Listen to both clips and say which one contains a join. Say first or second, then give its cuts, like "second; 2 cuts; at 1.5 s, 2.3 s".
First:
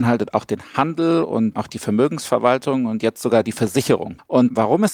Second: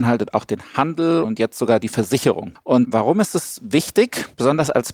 second; 1 cut; at 1.2 s